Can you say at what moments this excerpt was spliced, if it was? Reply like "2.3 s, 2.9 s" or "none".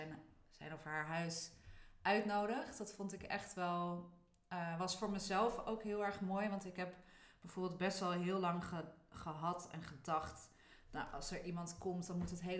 none